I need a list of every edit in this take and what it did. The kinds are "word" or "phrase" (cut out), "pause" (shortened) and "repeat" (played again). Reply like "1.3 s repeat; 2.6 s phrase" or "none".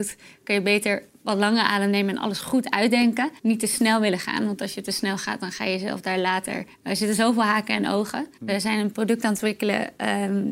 3.4 s pause; 6.7 s pause; 8.4 s pause